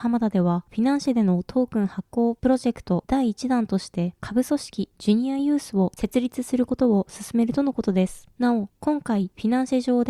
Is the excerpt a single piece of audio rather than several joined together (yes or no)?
no